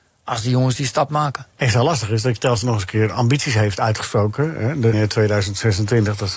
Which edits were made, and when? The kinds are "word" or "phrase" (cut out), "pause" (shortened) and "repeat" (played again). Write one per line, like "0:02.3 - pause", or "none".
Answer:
0:01.1 - word
0:01.5 - pause
0:02.6 - word
0:04.9 - word